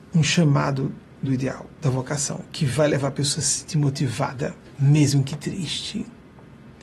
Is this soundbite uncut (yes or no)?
yes